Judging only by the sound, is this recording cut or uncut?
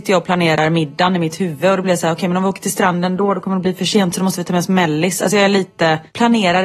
uncut